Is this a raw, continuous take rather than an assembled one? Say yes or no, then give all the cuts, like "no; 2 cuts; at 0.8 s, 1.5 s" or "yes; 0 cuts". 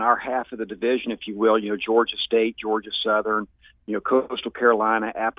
yes; 0 cuts